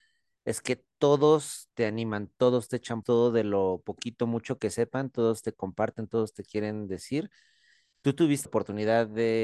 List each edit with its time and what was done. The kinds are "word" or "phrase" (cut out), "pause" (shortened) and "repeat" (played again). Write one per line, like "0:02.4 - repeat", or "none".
0:03.0 - word
0:08.4 - word